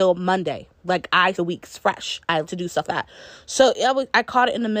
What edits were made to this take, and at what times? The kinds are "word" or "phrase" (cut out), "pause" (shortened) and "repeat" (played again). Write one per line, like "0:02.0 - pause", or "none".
0:01.3 - word
0:02.4 - word
0:02.8 - word